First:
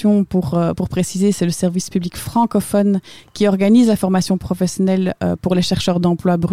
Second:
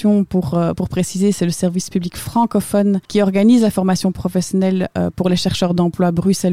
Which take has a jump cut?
second; 1 cut; at 3.0 s

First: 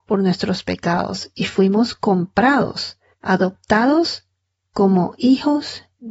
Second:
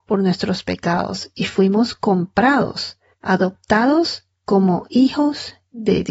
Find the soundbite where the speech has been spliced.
second; 1 cut; at 4.4 s

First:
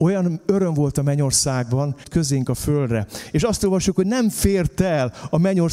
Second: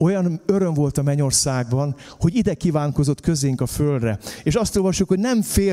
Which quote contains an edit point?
first; 1 cut; at 2.0 s

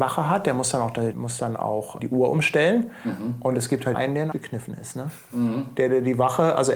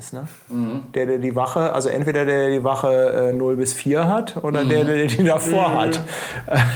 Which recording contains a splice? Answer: first; 4 cuts; at 1.1 s, 2.0 s, 3.9 s, 4.3 s

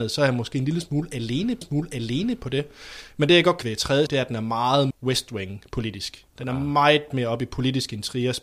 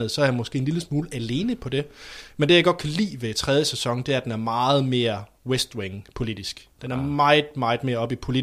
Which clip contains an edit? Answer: first; 5 cuts; at 1.6 s, 3.6 s, 4.1 s, 4.9 s, 7.1 s

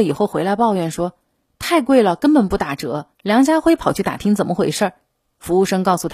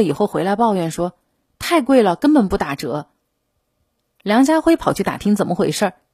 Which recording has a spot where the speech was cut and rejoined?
first; 1 cut; at 3.1 s

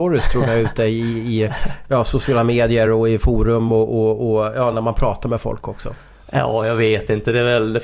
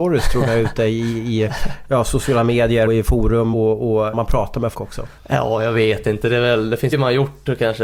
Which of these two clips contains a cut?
second; 6 cuts; at 2.9 s, 3.5 s, 4.1 s, 4.7 s, 5.2 s, 6.9 s

